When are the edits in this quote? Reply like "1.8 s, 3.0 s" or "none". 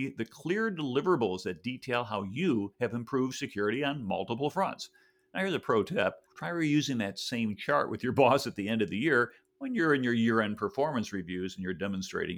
6.2 s